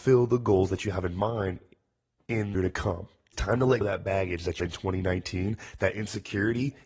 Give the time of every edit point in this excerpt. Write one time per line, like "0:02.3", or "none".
0:02.5
0:03.3
0:03.8
0:04.6